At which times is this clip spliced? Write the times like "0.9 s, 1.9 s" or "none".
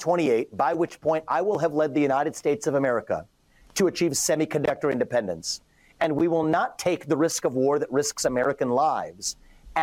none